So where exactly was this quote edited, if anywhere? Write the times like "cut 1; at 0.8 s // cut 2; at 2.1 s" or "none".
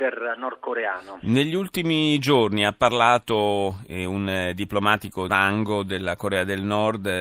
cut 1; at 5.3 s